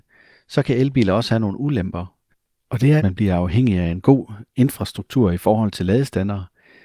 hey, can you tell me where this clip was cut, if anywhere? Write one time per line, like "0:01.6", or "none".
0:02.3
0:03.0